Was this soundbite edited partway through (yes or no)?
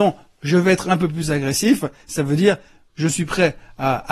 no